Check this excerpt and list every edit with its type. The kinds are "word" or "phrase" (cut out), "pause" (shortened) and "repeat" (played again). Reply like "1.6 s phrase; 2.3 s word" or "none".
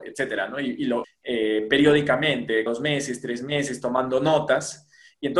1.0 s phrase; 2.7 s word